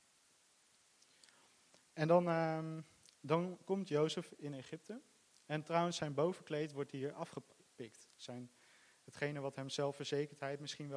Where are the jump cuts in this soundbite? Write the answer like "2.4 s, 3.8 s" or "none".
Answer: none